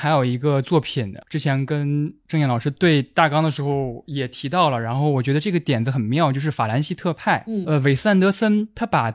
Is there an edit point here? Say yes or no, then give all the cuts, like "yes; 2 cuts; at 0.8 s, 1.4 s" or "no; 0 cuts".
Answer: no; 0 cuts